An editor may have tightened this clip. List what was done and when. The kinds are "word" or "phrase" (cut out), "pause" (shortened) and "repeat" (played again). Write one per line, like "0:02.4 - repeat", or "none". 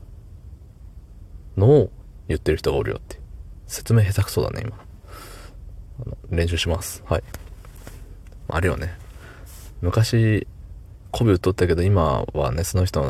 0:08.5 - phrase

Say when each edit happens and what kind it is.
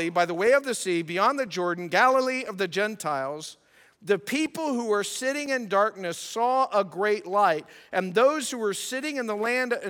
none

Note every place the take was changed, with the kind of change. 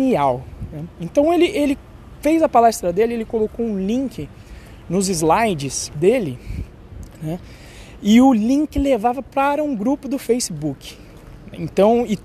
0:05.9 - phrase

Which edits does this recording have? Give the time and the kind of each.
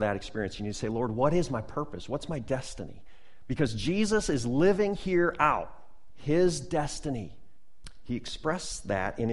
none

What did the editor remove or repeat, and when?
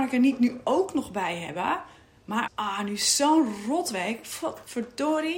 0:02.5 - word

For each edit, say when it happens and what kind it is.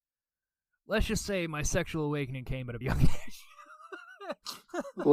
0:02.8 - word

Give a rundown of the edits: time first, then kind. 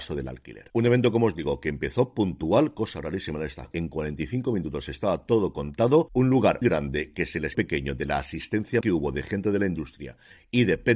0:03.7 - word
0:06.6 - word
0:07.5 - word
0:08.8 - word

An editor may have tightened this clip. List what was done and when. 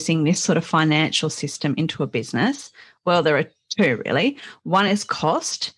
none

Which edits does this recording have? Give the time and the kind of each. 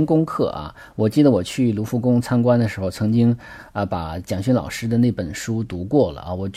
none

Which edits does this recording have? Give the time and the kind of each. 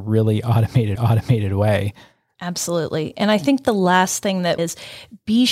0:01.0 - repeat
0:04.6 - phrase

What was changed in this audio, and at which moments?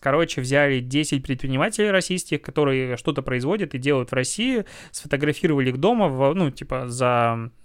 none

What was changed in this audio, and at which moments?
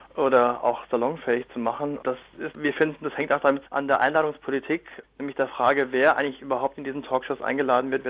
0:02.5 - phrase
0:03.7 - word

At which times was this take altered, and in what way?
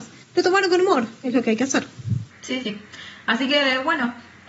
0:01.2 - word
0:02.6 - word

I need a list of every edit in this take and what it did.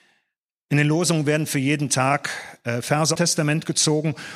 0:03.2 - phrase

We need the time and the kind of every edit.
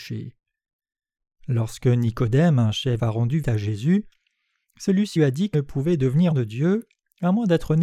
0:03.0 - word
0:03.4 - word
0:05.2 - word
0:05.5 - word
0:06.3 - word

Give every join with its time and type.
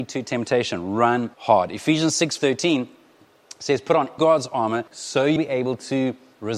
0:01.3 - pause
0:02.4 - word
0:04.2 - phrase
0:04.9 - pause
0:05.4 - word

